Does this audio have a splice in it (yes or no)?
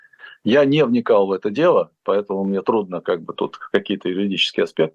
no